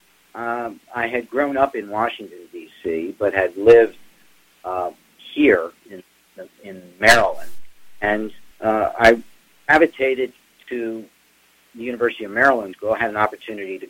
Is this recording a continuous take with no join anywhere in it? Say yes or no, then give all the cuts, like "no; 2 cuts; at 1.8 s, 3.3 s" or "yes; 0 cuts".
no; 2 cuts; at 8.5 s, 12.7 s